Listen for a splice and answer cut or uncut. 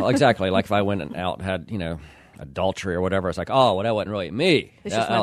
uncut